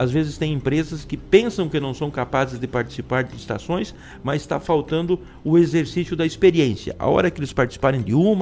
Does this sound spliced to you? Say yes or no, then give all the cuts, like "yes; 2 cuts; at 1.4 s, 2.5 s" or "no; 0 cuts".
no; 0 cuts